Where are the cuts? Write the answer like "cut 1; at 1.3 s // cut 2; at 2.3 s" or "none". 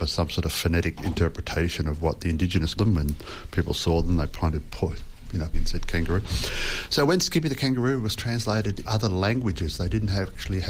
cut 1; at 2.8 s // cut 2; at 5.5 s // cut 3; at 8.8 s